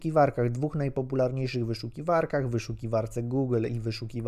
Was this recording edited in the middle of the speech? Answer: no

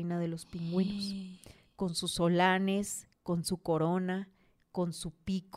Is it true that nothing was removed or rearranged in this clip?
yes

